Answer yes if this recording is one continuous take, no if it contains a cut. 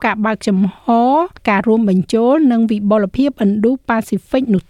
no